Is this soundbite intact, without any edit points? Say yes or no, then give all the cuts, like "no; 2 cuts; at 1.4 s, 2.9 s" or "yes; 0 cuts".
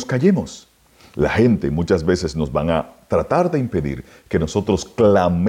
yes; 0 cuts